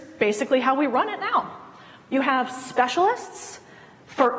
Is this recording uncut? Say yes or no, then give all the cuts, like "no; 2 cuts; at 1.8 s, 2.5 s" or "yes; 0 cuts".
yes; 0 cuts